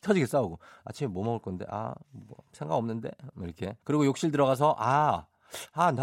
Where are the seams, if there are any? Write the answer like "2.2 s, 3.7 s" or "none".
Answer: 3.8 s